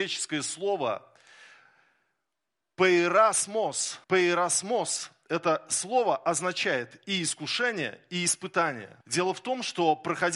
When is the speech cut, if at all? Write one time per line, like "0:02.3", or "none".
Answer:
0:04.0
0:09.0